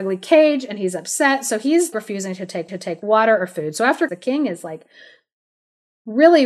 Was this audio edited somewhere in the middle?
yes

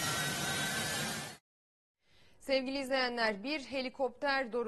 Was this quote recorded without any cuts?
yes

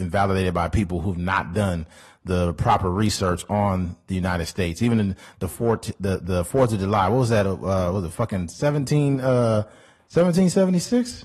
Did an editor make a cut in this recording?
no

